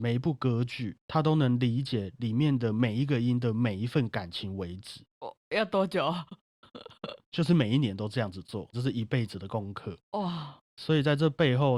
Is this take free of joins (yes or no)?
no